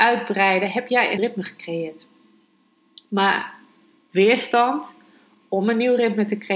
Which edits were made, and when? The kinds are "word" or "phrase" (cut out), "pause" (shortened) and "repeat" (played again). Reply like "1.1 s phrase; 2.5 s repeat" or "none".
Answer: 1.2 s word